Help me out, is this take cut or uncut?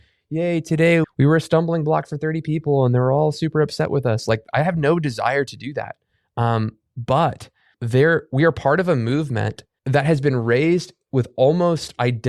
cut